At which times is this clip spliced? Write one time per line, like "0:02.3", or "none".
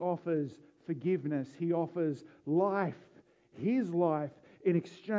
none